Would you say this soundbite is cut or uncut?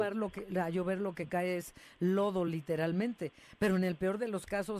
uncut